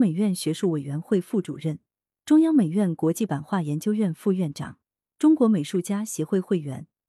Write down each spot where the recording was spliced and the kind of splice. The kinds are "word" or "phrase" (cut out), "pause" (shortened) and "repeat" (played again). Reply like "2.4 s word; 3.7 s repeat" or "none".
none

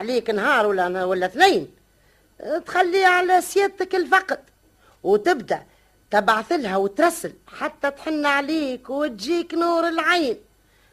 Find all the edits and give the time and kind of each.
none

